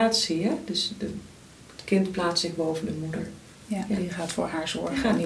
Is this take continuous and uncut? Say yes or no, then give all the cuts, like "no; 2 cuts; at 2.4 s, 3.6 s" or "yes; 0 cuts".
yes; 0 cuts